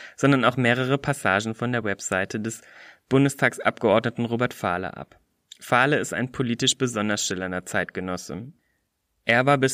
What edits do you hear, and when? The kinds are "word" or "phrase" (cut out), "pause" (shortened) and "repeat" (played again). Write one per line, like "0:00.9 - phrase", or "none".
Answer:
none